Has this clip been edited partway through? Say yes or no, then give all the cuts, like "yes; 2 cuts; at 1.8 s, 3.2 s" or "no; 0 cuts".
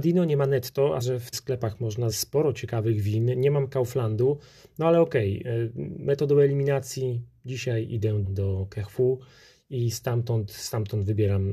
yes; 4 cuts; at 1.0 s, 1.3 s, 2.1 s, 8.2 s